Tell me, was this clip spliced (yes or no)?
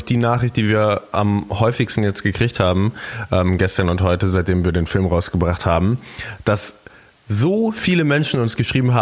no